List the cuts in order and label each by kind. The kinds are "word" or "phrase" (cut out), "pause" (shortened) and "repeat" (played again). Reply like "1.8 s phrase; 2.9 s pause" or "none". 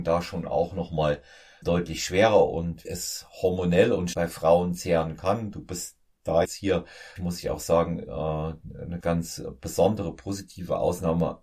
1.6 s word; 2.8 s word; 4.1 s word; 6.4 s word; 7.2 s word; 9.0 s word